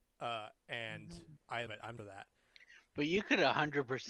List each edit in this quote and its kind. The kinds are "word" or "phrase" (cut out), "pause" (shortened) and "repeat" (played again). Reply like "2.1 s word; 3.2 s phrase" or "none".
1.7 s word; 2.0 s phrase